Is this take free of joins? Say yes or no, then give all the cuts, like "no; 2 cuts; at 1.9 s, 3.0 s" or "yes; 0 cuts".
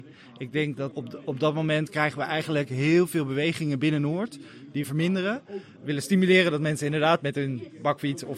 no; 2 cuts; at 0.9 s, 4.8 s